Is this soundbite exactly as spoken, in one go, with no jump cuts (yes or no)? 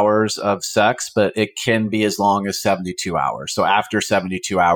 yes